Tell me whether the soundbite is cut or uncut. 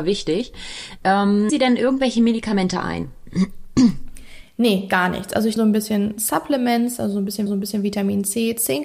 cut